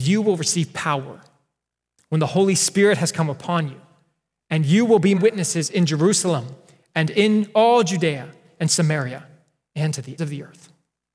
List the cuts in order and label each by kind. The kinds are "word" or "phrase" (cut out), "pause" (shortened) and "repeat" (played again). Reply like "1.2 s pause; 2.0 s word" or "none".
5.1 s word; 10.2 s word